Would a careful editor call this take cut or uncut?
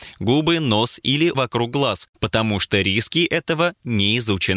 cut